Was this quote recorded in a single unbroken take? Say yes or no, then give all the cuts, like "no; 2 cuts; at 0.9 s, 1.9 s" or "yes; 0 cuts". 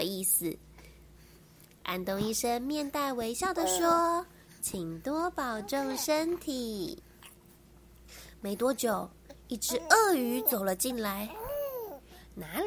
yes; 0 cuts